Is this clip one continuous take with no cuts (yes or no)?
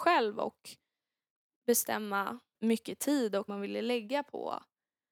no